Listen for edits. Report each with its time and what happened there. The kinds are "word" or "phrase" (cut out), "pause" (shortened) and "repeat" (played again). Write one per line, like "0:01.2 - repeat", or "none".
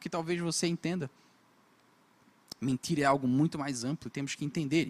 none

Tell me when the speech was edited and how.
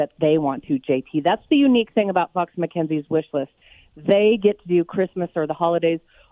none

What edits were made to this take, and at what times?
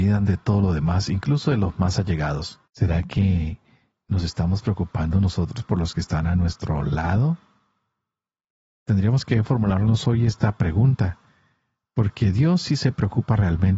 0:02.6 - pause

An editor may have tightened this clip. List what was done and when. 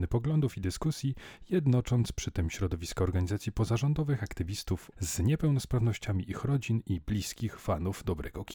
0:04.9 - word

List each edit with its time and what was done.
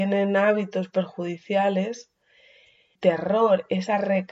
0:03.0 - word

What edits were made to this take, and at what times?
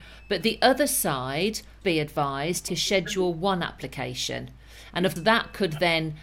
0:01.8 - word
0:02.7 - word
0:05.2 - word

